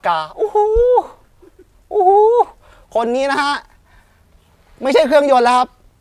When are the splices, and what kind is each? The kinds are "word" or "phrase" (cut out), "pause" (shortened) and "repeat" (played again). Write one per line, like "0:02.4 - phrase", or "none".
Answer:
none

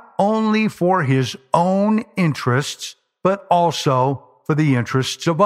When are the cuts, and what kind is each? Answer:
none

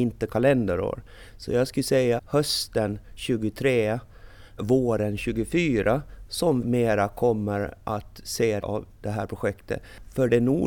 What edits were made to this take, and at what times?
0:02.2 - phrase
0:04.6 - word
0:06.6 - word
0:08.6 - word

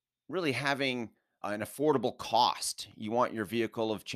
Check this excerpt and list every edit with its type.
0:01.4 - word

